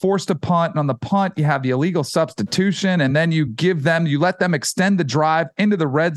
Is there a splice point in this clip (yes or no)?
no